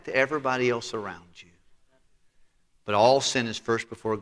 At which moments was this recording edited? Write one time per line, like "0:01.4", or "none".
none